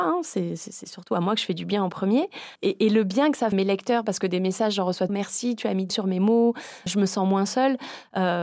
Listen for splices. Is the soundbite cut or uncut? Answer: cut